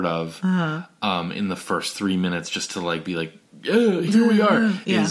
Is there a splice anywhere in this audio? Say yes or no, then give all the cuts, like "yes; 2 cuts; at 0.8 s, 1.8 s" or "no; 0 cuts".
no; 0 cuts